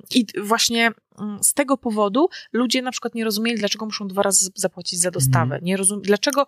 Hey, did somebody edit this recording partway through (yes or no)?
no